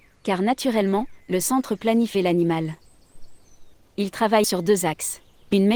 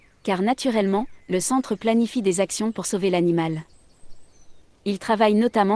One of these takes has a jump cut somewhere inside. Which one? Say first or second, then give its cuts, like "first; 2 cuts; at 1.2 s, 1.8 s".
first; 2 cuts; at 2.1 s, 4.4 s